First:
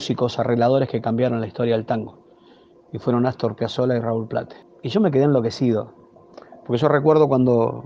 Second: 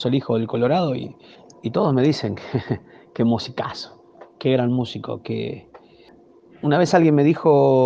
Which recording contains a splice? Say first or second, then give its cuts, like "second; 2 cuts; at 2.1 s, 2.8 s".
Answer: second; 1 cut; at 1.3 s